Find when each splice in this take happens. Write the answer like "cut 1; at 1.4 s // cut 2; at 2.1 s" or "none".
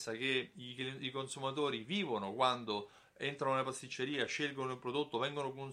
none